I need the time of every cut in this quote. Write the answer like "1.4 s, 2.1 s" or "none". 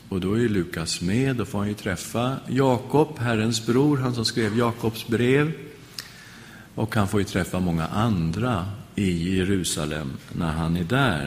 6.7 s